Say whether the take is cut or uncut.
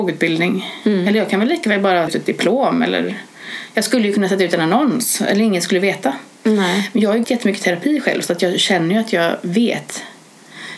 cut